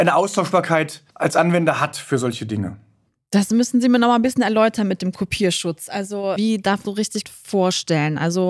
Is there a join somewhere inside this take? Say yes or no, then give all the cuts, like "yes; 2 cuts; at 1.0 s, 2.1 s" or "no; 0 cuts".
yes; 5 cuts; at 1.1 s, 3.1 s, 6.4 s, 6.8 s, 7.2 s